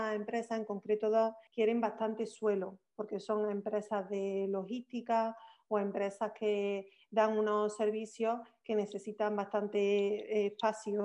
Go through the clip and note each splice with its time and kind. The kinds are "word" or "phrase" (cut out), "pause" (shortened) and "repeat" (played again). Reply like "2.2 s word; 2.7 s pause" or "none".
1.5 s pause